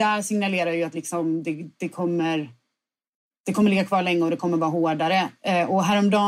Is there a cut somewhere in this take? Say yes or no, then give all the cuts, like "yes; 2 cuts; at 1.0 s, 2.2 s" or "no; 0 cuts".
no; 0 cuts